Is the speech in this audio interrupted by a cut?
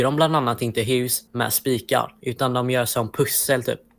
yes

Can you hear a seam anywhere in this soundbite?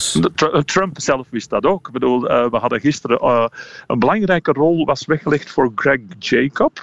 no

